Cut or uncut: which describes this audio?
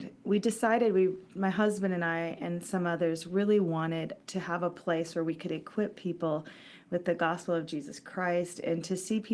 uncut